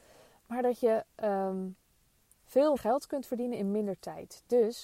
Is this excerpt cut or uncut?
cut